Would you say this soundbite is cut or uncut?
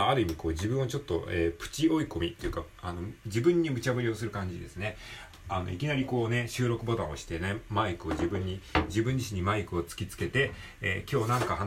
cut